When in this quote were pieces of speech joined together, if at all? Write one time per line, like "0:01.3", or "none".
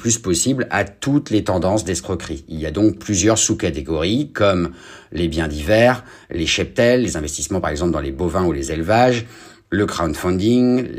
none